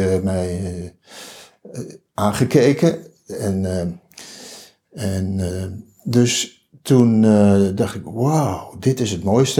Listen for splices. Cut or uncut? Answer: uncut